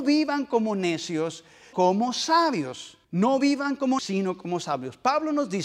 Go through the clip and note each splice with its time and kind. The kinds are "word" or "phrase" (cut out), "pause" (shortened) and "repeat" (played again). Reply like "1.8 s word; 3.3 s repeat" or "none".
1.7 s word; 3.0 s pause; 4.0 s word